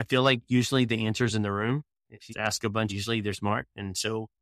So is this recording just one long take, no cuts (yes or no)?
no